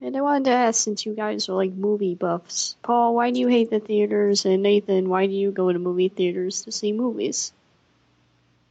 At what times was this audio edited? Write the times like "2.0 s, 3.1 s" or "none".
2.8 s

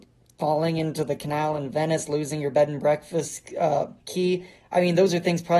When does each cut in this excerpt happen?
4.0 s

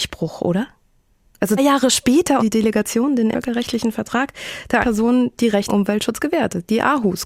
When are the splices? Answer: 1.6 s, 2.4 s, 3.3 s, 4.8 s, 5.7 s

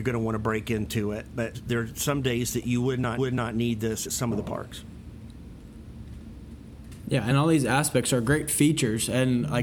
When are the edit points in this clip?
1.5 s, 3.2 s, 4.1 s, 7.3 s

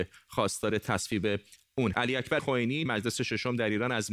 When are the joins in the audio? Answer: 1.9 s, 2.4 s, 2.9 s

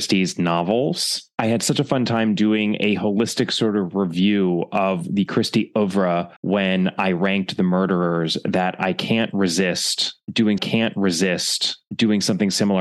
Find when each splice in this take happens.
6.4 s, 10.6 s

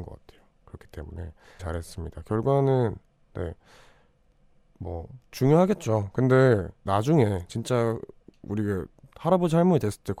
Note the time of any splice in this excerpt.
1.6 s, 5.3 s, 6.9 s

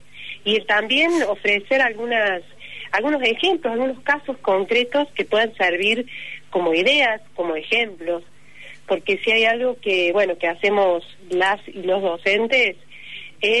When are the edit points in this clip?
none

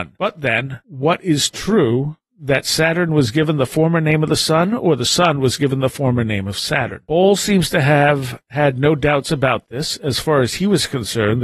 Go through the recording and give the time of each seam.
none

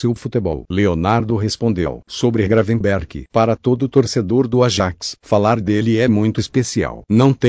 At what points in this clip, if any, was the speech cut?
none

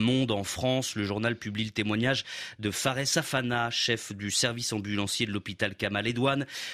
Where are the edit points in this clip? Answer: none

